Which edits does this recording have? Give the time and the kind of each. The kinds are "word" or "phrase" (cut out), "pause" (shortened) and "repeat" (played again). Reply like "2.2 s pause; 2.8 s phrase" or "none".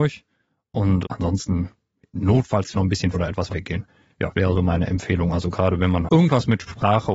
1.0 s word; 2.7 s word; 3.1 s word; 3.5 s word; 4.3 s word; 6.1 s word